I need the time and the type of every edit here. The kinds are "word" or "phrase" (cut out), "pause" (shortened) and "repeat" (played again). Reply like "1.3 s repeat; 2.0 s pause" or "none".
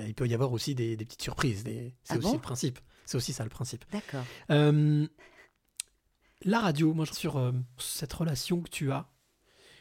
7.1 s word; 7.8 s word